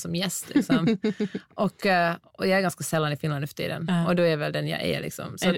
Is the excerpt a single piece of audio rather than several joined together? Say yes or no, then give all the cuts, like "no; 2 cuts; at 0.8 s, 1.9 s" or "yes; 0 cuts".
yes; 0 cuts